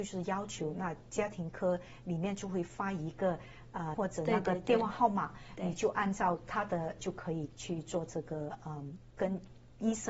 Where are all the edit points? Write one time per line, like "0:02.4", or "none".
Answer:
0:03.9
0:07.0